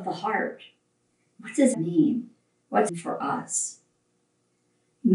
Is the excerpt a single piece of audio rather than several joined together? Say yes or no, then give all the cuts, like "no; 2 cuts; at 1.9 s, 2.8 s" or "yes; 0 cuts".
no; 2 cuts; at 1.7 s, 2.9 s